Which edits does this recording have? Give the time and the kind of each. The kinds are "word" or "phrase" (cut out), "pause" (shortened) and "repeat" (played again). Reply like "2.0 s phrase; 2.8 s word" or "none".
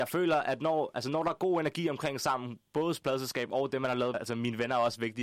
4.1 s phrase